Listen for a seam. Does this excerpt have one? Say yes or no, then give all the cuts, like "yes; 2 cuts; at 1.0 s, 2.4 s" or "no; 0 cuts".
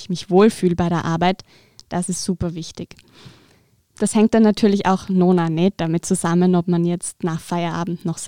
no; 0 cuts